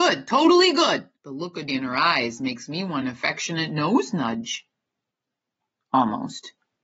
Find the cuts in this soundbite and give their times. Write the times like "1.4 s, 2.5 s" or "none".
1.2 s, 1.7 s, 3.0 s

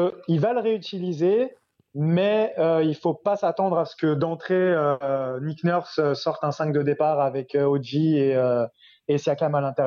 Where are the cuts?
none

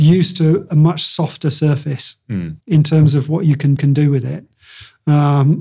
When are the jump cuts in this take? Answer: 2.6 s, 3.8 s

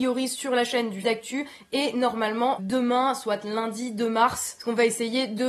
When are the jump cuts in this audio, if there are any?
1.0 s, 2.6 s

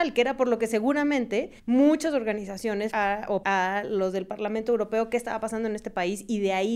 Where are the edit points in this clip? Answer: 1.6 s, 2.9 s, 3.4 s

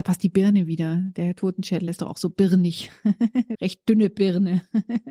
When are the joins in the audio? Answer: 1.9 s, 3.5 s

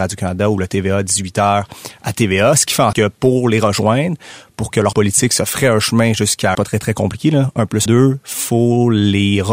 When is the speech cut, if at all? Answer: 2.9 s, 4.9 s, 6.5 s, 7.9 s

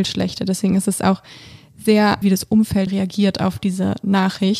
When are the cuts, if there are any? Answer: 2.2 s, 2.9 s

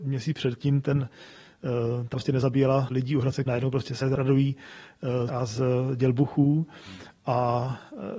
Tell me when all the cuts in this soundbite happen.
2.1 s, 2.9 s, 3.5 s, 4.0 s, 5.3 s

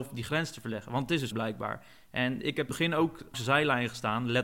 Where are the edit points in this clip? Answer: 1.3 s, 2.7 s, 3.3 s

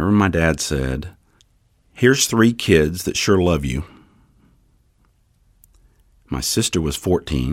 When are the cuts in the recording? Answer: 1.4 s

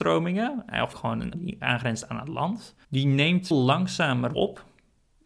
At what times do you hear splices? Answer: 0.9 s, 1.3 s, 2.8 s, 3.5 s, 4.3 s

